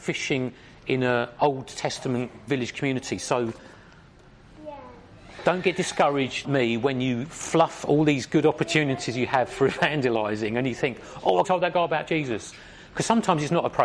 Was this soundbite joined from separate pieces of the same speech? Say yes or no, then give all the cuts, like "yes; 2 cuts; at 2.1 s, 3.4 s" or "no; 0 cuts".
yes; 2 cuts; at 6.4 s, 11.4 s